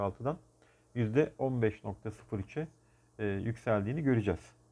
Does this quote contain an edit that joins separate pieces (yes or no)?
no